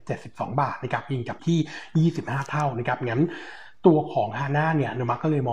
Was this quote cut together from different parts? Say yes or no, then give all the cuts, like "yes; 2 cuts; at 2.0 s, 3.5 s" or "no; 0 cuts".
yes; 1 cut; at 1.4 s